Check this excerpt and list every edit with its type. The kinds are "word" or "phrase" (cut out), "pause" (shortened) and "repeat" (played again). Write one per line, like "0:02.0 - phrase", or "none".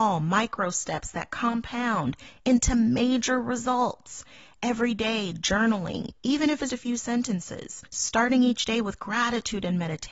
0:06.7 - word
0:07.9 - pause